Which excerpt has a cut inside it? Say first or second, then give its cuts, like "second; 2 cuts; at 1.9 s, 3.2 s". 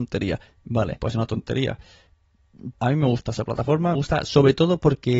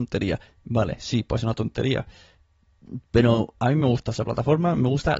first; 3 cuts; at 1.0 s, 2.7 s, 4.0 s